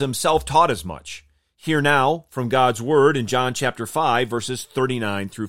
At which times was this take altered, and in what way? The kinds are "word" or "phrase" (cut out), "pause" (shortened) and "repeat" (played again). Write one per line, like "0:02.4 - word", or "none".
none